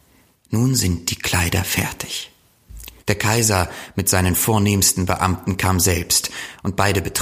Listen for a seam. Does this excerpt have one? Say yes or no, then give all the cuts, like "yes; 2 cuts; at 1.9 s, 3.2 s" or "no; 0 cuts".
yes; 1 cut; at 3.0 s